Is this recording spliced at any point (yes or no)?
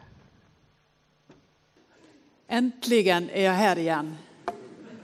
no